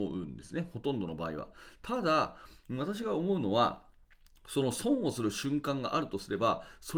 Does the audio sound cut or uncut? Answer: uncut